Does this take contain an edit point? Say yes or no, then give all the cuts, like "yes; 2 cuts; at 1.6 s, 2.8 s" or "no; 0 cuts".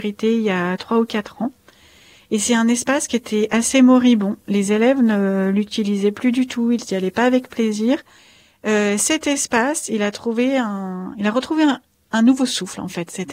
no; 0 cuts